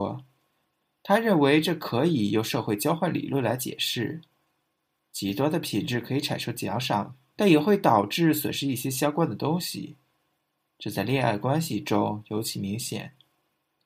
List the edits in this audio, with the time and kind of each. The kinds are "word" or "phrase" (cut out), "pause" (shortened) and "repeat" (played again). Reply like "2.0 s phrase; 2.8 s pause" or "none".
7.3 s phrase